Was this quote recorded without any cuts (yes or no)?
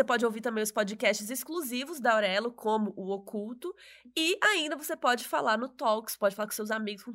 yes